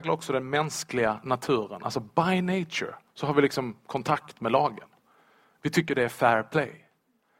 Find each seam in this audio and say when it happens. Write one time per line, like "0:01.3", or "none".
0:03.1